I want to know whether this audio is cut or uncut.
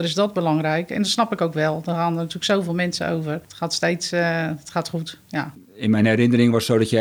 uncut